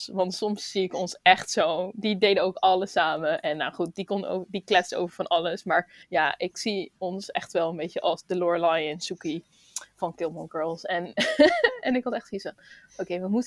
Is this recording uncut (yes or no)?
no